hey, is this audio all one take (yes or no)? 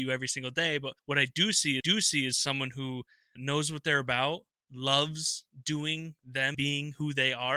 no